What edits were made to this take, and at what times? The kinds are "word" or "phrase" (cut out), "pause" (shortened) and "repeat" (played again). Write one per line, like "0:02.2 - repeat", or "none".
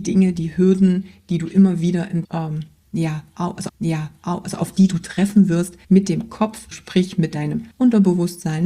0:02.2 - word
0:03.7 - repeat
0:05.8 - pause
0:06.7 - word
0:07.7 - pause